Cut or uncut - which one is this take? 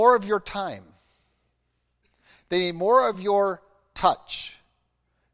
uncut